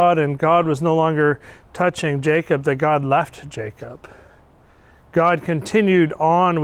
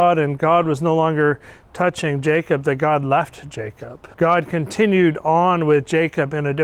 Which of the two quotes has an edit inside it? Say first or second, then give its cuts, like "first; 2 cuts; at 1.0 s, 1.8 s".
second; 1 cut; at 4.1 s